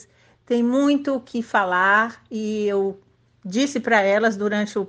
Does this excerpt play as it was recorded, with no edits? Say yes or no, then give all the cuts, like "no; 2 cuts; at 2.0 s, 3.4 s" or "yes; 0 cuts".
yes; 0 cuts